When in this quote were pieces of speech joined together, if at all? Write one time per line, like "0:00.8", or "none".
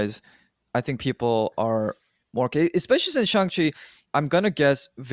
0:04.0